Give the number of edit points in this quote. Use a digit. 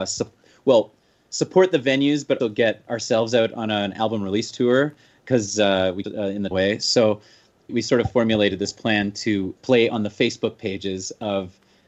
6